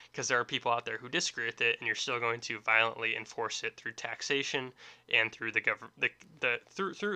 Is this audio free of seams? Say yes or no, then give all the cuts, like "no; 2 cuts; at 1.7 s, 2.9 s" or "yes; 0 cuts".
yes; 0 cuts